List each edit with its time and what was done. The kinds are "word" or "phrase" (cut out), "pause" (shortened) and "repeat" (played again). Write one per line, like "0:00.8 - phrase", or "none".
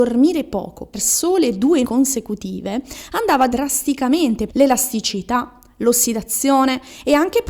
0:00.9 - word
0:01.8 - word
0:03.5 - word
0:04.5 - phrase